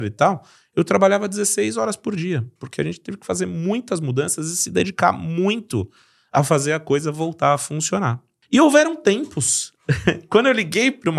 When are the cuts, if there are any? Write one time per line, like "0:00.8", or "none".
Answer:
none